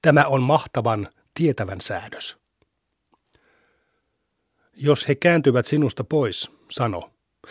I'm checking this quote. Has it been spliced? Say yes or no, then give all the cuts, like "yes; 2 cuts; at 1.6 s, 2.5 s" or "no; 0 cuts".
no; 0 cuts